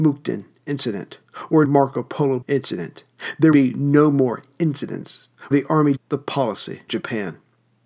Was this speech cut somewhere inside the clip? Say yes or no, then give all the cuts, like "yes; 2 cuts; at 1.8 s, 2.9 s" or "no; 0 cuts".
yes; 6 cuts; at 1.6 s, 2.4 s, 3.5 s, 5.5 s, 6.0 s, 6.9 s